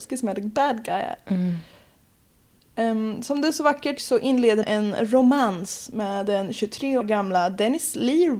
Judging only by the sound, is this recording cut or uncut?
cut